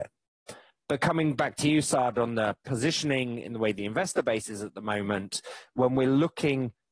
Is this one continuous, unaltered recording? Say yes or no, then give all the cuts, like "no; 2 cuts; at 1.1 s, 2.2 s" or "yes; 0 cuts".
yes; 0 cuts